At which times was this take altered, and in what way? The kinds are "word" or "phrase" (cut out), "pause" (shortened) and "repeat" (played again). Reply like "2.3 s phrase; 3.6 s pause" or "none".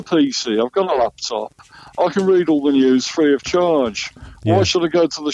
none